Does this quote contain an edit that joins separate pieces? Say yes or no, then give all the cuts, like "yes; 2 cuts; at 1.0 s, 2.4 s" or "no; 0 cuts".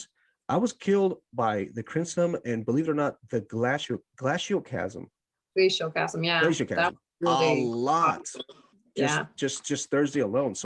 no; 0 cuts